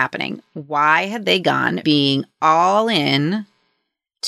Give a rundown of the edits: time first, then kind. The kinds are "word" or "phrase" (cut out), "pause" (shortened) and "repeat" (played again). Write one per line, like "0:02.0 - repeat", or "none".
0:01.8 - word